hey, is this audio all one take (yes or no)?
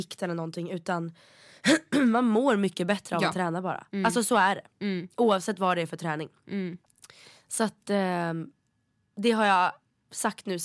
yes